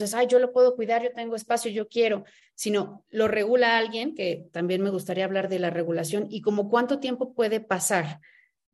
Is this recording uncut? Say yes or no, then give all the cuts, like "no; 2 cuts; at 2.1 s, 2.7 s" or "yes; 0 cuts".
yes; 0 cuts